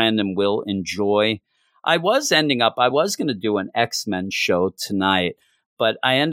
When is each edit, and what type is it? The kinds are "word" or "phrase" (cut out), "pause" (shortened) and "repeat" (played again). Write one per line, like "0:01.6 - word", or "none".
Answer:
none